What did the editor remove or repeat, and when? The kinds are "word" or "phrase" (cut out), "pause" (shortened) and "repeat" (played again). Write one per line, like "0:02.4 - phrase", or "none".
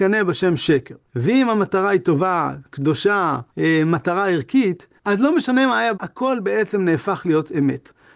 0:01.0 - pause
0:03.5 - pause
0:05.0 - pause
0:05.9 - word